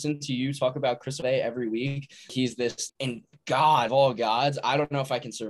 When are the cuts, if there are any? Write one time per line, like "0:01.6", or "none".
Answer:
0:01.2
0:02.3
0:02.9
0:03.9